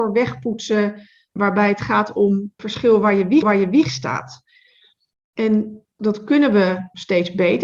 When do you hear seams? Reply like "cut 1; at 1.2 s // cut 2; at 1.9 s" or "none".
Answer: cut 1; at 2.6 s // cut 2; at 3.4 s